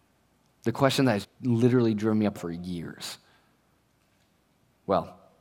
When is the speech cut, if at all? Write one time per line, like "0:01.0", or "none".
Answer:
0:01.2
0:02.4